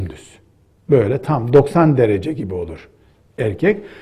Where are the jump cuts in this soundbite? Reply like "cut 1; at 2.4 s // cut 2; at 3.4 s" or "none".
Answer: none